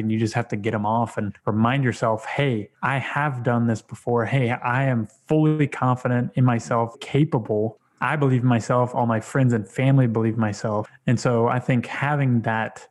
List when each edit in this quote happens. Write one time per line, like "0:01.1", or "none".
0:02.7
0:06.9